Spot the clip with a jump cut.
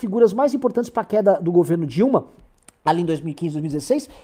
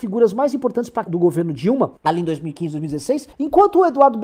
second; 3 cuts; at 1.1 s, 2.0 s, 3.3 s

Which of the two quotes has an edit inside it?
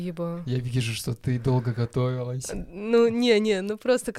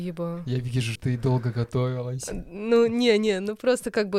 second; 1 cut; at 1.0 s

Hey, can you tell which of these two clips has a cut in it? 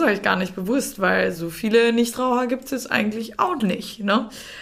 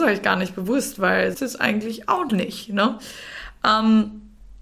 second; 1 cut; at 1.3 s

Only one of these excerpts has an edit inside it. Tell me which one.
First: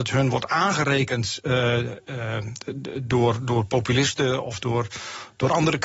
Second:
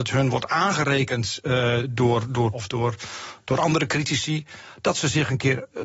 second; 2 cuts; at 1.8 s, 2.5 s

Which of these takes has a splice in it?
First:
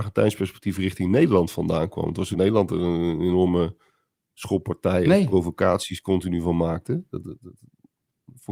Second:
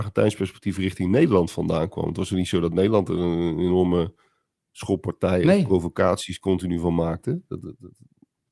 first; 1 cut; at 2.3 s

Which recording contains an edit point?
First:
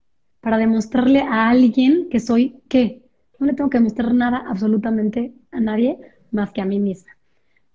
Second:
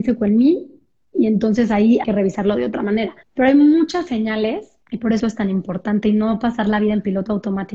second; 4 cuts; at 2.0 s, 3.2 s, 4.8 s, 5.2 s

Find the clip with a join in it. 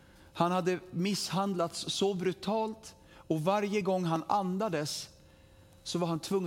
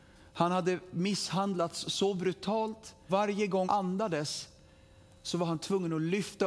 second; 2 cuts; at 3.1 s, 3.6 s

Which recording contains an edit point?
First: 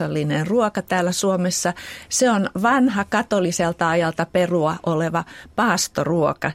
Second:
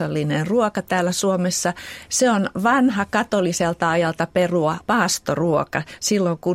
second; 1 cut; at 4.8 s

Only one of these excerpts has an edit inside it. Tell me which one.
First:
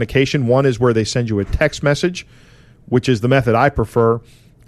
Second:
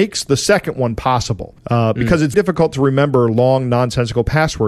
second; 2 cuts; at 1.6 s, 2.3 s

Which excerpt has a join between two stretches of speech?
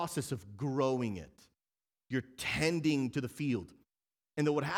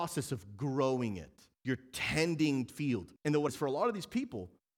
second; 4 cuts; at 1.5 s, 2.7 s, 3.2 s, 3.5 s

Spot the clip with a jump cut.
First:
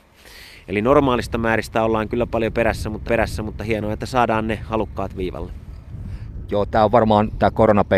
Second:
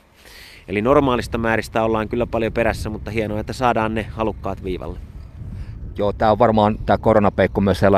first; 1 cut; at 3.1 s

